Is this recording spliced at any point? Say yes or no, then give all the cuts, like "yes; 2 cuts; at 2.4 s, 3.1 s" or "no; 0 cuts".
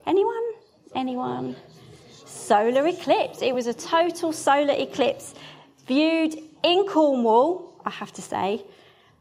no; 0 cuts